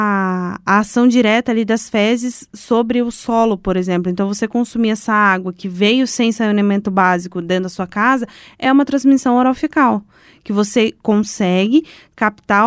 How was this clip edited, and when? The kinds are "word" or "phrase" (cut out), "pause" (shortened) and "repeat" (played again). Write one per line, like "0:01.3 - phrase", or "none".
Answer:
none